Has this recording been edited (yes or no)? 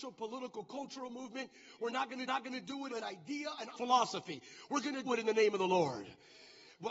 yes